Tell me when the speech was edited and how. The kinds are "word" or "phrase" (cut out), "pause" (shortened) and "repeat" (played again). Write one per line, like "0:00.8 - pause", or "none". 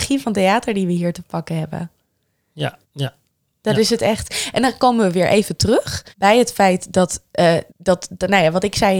0:02.8 - pause
0:06.1 - pause
0:07.7 - pause